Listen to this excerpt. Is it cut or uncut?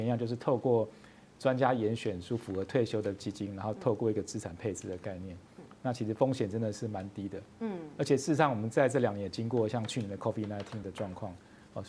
uncut